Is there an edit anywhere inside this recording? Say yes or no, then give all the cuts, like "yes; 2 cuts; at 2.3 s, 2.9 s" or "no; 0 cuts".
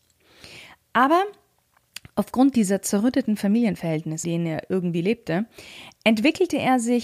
yes; 1 cut; at 4.2 s